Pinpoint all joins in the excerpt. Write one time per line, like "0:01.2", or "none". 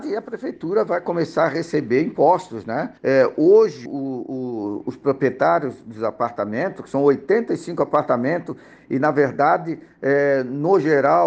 0:03.0
0:03.9